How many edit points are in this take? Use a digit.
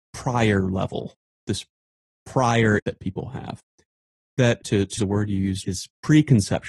5